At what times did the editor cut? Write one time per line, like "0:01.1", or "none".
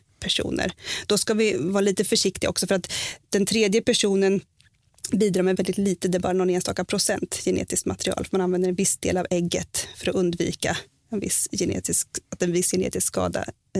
0:05.5